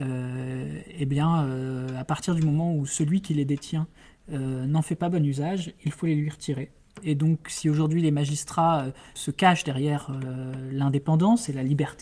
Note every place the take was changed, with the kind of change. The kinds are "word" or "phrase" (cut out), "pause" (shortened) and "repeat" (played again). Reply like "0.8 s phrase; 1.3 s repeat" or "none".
none

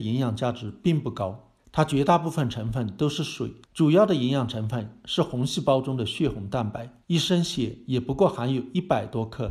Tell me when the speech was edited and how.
1.6 s pause; 3.6 s pause; 7.0 s pause

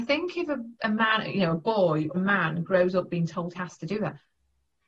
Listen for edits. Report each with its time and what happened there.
2.1 s word; 3.5 s word

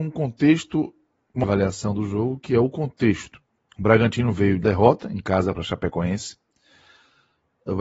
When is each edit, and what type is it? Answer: 1.4 s phrase; 3.5 s pause; 4.6 s word

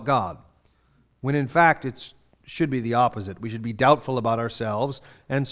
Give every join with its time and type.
none

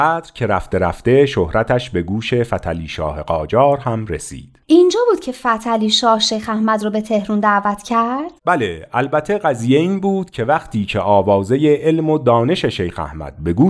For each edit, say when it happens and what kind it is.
4.6 s pause; 8.4 s pause

